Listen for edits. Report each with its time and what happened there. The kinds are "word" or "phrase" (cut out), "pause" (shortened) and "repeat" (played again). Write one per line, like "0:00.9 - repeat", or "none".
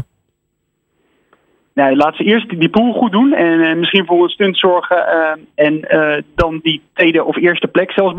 none